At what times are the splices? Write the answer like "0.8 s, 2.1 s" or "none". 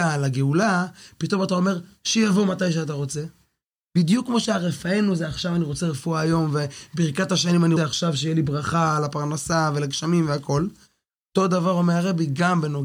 7.8 s